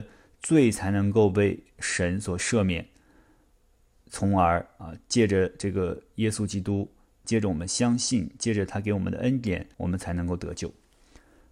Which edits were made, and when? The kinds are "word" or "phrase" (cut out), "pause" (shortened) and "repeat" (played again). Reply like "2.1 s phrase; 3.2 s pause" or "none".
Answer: 7.2 s word; 9.7 s pause